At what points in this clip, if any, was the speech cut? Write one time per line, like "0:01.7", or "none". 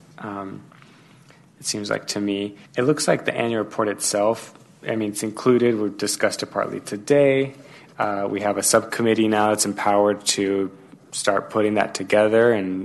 0:02.7